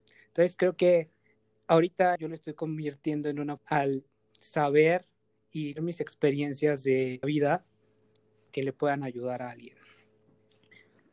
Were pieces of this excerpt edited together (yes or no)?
yes